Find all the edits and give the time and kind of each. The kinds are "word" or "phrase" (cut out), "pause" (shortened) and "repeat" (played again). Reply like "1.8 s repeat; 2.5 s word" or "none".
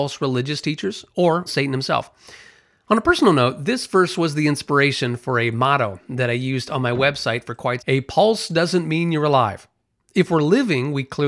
1.5 s word; 7.8 s phrase